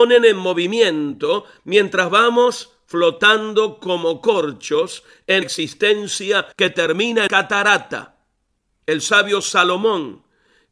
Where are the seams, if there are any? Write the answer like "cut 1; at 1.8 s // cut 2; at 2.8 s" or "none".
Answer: cut 1; at 5.4 s // cut 2; at 6.5 s // cut 3; at 7.3 s